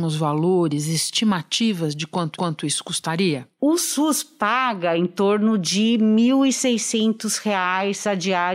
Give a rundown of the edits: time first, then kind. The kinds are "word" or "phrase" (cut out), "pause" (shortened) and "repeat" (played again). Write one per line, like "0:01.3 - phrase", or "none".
0:02.3 - repeat